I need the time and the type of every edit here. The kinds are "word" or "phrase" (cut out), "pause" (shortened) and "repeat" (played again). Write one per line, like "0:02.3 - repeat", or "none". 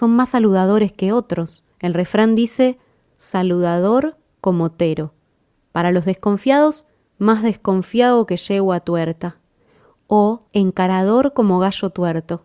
0:01.7 - pause
0:06.9 - pause
0:10.5 - pause